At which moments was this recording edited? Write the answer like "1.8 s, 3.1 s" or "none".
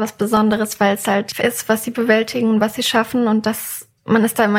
1.4 s